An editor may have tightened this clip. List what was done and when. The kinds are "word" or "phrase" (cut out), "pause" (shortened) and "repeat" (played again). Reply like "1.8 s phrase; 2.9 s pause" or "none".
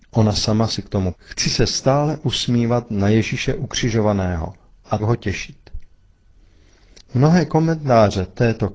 1.1 s word; 5.0 s word